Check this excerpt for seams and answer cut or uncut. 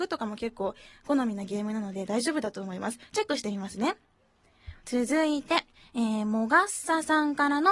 cut